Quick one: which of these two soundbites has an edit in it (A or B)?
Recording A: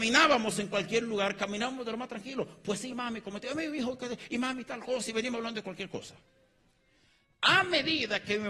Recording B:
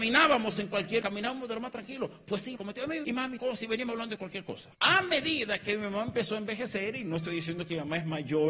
B